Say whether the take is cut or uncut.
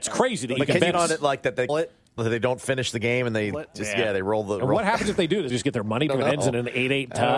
cut